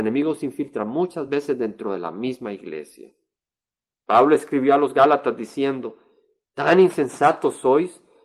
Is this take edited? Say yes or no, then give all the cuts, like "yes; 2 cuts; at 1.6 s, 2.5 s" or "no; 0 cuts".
no; 0 cuts